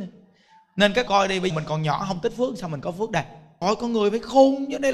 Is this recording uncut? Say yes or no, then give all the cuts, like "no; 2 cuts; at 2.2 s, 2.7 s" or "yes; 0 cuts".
no; 3 cuts; at 1.1 s, 1.5 s, 3.6 s